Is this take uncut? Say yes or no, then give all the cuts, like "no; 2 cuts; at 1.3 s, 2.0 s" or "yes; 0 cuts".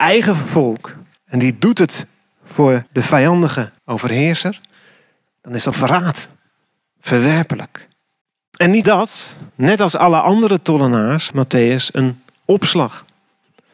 no; 8 cuts; at 1.2 s, 2.9 s, 3.8 s, 5.7 s, 8.2 s, 8.8 s, 9.5 s, 11.3 s